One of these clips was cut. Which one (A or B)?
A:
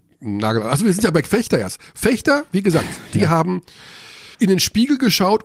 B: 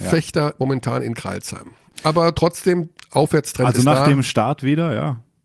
A